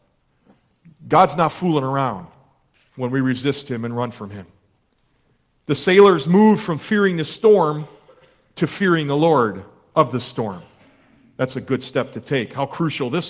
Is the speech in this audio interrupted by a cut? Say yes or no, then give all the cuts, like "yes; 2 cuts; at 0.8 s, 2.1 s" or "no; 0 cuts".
no; 0 cuts